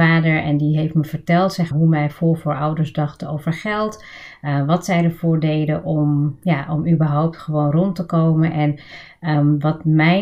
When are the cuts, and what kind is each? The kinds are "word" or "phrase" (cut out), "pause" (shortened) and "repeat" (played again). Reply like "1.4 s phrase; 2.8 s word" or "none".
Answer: 1.7 s word